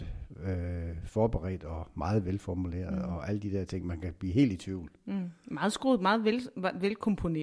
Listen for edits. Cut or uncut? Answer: uncut